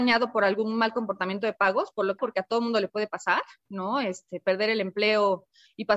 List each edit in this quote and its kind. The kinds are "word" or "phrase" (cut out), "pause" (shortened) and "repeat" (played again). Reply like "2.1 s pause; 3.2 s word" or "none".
2.2 s word